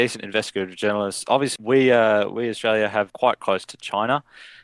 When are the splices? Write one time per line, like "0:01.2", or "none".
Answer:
0:01.6
0:03.1
0:03.6